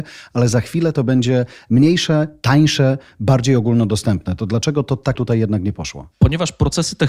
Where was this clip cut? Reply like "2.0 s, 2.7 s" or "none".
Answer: 5.1 s